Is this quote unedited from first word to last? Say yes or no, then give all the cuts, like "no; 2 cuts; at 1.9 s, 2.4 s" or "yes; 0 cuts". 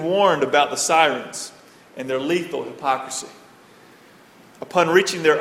yes; 0 cuts